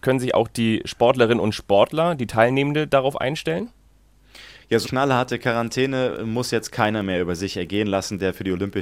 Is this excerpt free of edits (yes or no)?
no